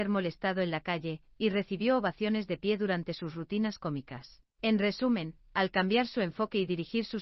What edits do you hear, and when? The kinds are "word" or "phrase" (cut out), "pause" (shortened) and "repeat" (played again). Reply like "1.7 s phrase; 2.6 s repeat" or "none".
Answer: 4.5 s pause